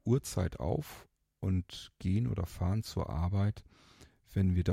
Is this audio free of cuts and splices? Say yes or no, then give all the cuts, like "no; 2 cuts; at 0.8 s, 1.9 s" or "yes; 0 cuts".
yes; 0 cuts